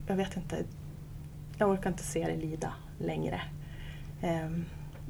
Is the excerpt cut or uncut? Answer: uncut